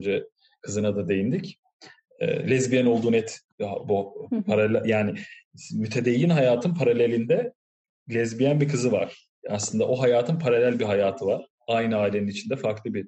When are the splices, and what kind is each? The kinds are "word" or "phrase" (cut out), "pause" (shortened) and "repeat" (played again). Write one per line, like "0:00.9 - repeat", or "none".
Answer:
0:03.5 - word